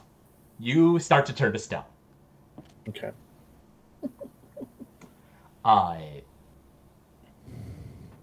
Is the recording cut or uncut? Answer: uncut